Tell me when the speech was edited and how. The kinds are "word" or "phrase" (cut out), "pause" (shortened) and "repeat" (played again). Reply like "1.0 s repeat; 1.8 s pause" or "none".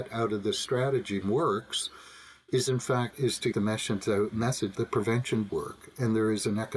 1.2 s word; 3.1 s word; 3.5 s word; 4.7 s word; 5.5 s word

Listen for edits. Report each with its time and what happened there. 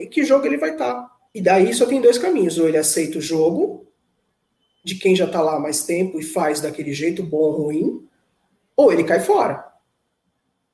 1.3 s pause

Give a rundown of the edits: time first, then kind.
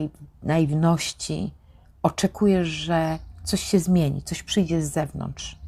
1.8 s pause

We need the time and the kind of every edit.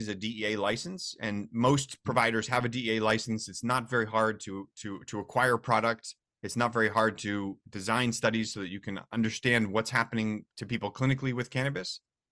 none

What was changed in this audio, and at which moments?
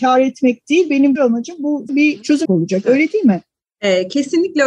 1.1 s word; 1.9 s word; 2.4 s word

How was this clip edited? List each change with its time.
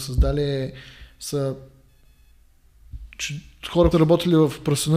3.9 s word

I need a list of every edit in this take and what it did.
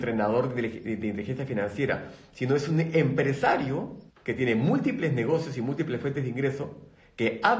4.1 s pause

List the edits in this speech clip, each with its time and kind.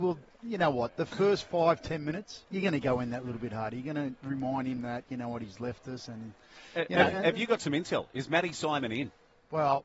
2.5 s pause

